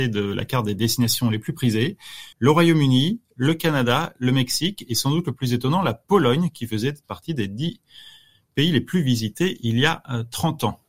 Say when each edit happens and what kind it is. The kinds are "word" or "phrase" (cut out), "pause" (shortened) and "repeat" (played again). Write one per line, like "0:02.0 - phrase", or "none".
0:02.3 - pause